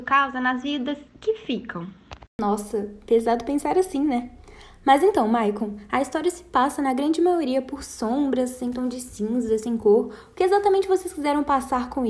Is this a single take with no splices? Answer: yes; 0 cuts

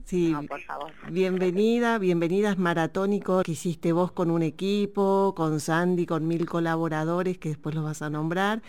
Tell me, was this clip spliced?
yes; 1 cut; at 3.4 s

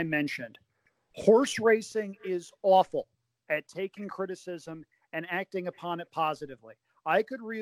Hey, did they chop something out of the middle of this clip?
no; 0 cuts

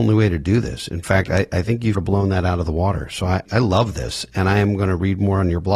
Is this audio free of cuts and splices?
no; 2 cuts; at 1.9 s, 3.5 s

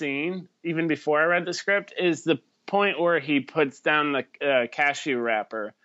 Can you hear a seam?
no; 0 cuts

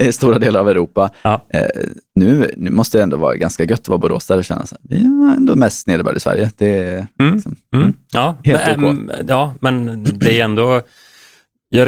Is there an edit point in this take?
no; 0 cuts

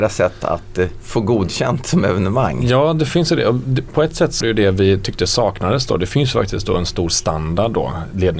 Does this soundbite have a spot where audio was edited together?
yes; 1 cut; at 4.4 s

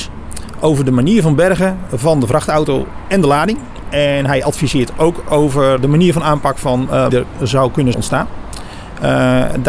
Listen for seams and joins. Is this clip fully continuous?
no; 3 cuts; at 5.8 s, 7.1 s, 7.9 s

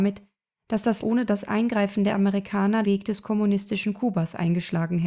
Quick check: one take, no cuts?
no; 2 cuts; at 1.0 s, 2.8 s

